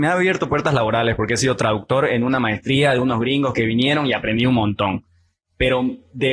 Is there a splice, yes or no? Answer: no